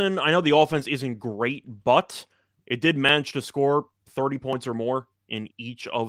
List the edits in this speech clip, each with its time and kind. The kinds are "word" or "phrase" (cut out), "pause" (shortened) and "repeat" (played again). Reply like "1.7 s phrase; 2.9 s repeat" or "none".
none